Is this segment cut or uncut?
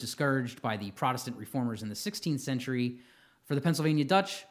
uncut